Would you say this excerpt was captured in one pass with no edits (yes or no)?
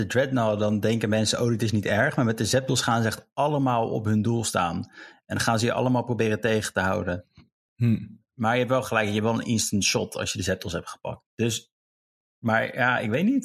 yes